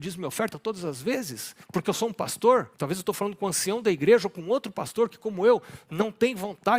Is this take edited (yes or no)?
yes